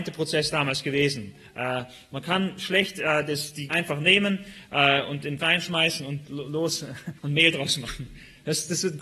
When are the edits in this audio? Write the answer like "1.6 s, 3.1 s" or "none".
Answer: 3.7 s, 5.4 s, 7.2 s